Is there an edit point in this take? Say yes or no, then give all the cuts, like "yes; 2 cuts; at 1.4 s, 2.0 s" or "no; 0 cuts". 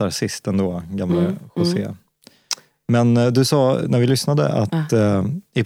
no; 0 cuts